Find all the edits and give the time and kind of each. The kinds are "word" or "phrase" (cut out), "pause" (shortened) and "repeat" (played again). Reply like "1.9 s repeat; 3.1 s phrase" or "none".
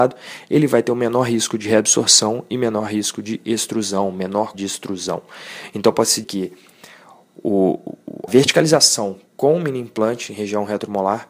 4.5 s word; 6.2 s word; 8.3 s word; 9.3 s pause